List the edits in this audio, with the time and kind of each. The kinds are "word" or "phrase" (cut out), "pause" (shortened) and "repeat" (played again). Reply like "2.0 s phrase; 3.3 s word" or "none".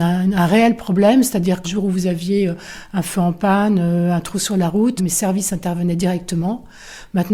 1.6 s phrase; 5.0 s word